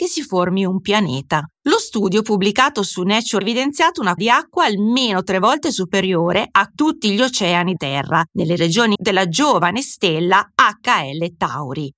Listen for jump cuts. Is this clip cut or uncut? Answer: cut